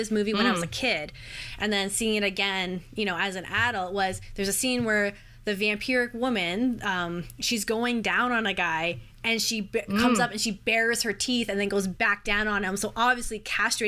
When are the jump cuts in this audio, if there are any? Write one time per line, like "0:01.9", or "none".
none

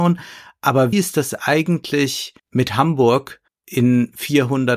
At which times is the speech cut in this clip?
0:00.9
0:02.4
0:03.5

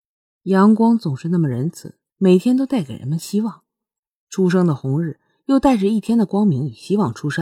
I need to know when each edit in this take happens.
0:02.1

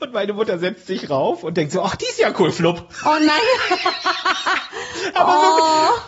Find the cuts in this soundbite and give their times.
none

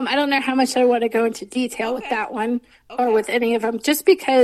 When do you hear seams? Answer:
none

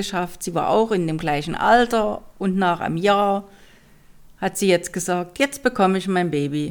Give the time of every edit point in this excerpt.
none

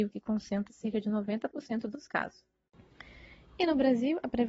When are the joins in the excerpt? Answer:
none

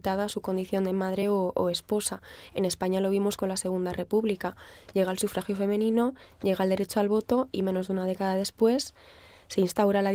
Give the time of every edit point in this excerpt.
none

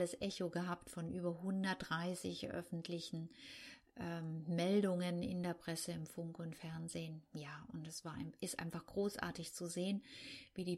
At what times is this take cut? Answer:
none

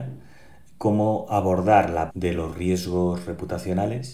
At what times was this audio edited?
0:02.1

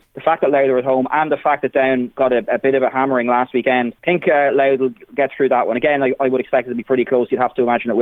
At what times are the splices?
0:04.0

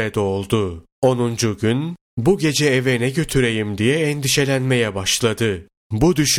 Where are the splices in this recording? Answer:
0:00.9

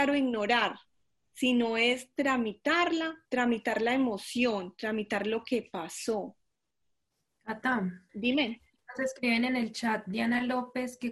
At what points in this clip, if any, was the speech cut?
0:03.3
0:08.1

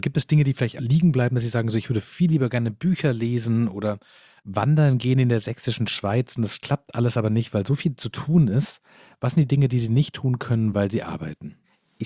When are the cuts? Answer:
none

